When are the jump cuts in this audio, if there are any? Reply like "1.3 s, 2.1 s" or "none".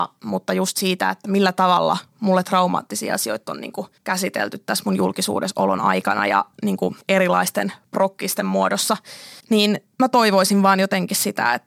4.0 s, 7.0 s, 9.4 s, 9.9 s